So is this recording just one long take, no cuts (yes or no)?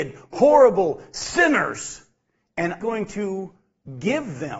no